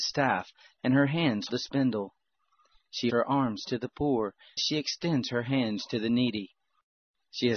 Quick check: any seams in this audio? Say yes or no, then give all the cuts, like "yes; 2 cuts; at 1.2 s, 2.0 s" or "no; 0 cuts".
yes; 3 cuts; at 1.5 s, 3.1 s, 4.6 s